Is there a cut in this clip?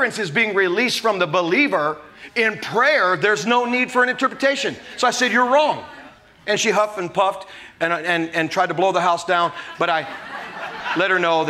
no; 0 cuts

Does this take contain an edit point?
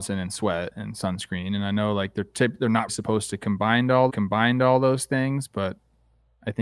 yes; 2 cuts; at 2.9 s, 4.1 s

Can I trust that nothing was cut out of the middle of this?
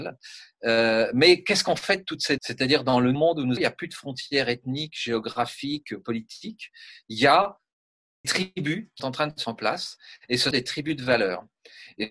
no; 7 cuts; at 2.4 s, 3.1 s, 3.6 s, 8.2 s, 9.0 s, 9.4 s, 10.5 s

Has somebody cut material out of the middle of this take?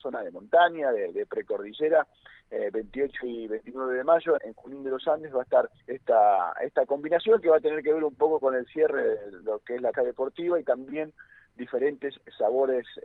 yes; 3 cuts; at 4.4 s, 5.8 s, 9.9 s

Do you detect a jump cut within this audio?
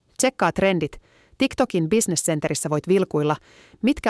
no; 0 cuts

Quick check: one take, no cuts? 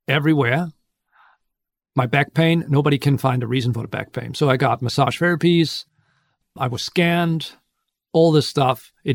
yes; 0 cuts

